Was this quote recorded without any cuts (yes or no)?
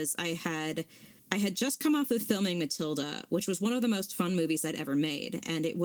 no